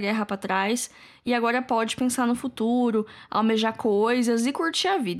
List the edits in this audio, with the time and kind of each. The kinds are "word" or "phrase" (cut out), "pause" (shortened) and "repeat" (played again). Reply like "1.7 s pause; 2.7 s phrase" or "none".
none